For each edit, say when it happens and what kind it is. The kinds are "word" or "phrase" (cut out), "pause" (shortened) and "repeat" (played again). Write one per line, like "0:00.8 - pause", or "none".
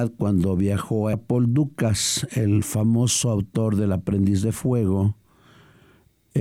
0:01.1 - phrase